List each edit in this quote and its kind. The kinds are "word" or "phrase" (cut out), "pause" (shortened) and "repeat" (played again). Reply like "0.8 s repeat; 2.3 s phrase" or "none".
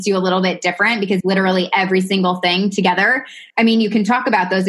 1.2 s phrase; 3.5 s pause